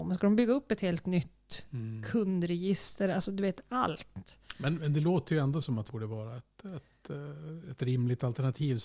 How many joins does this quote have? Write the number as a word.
one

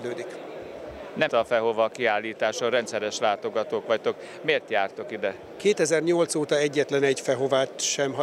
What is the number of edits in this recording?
one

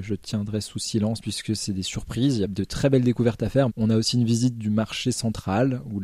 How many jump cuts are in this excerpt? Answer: one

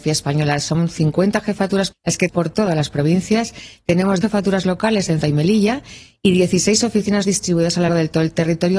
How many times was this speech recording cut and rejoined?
six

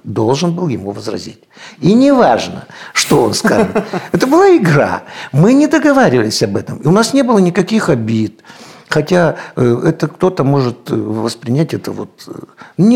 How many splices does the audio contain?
zero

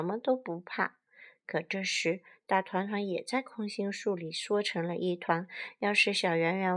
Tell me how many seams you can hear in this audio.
zero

